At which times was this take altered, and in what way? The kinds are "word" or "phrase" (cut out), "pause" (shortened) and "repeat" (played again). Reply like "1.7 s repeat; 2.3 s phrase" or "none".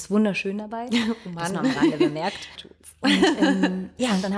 2.5 s word